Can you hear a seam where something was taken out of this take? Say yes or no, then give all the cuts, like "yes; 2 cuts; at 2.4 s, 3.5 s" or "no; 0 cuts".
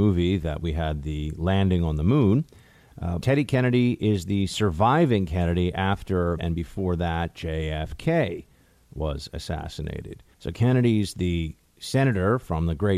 yes; 3 cuts; at 3.2 s, 6.4 s, 10.3 s